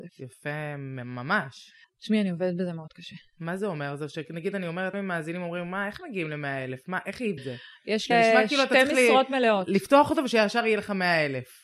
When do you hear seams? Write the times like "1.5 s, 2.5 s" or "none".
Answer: 1.8 s, 4.9 s, 7.4 s, 8.1 s